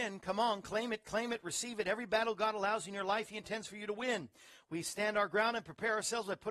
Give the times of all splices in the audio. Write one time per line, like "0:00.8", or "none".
none